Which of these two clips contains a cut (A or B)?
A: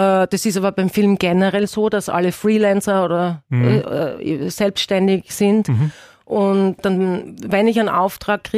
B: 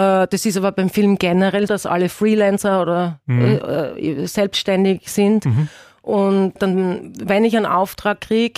B